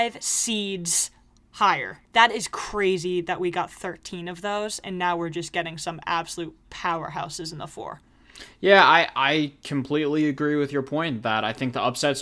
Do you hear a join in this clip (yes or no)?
yes